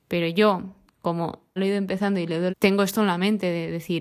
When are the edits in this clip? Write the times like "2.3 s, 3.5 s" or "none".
1.6 s, 2.5 s